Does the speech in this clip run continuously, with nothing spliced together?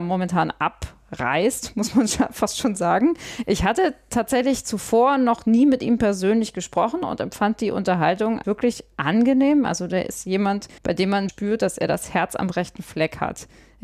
no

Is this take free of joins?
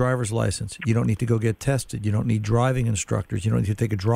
yes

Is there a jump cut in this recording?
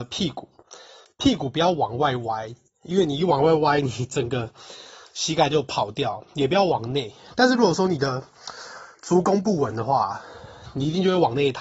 no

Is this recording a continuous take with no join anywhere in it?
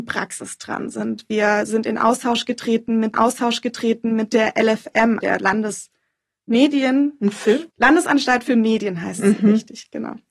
no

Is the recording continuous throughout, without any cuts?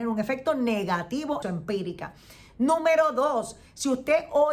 no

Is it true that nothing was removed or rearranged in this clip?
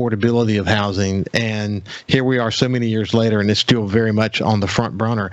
yes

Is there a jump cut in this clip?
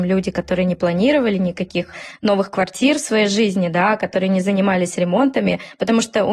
no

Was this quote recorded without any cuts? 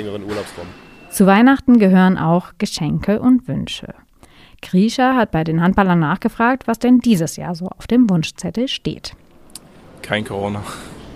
yes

